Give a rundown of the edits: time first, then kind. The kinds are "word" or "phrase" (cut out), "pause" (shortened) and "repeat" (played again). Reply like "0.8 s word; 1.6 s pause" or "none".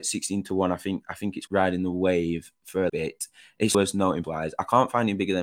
1.5 s word; 2.9 s word; 3.7 s word; 4.2 s word